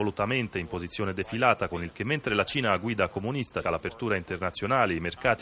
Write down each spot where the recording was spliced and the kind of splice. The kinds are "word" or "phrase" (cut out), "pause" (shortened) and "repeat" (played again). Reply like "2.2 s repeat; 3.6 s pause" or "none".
1.9 s word; 3.6 s word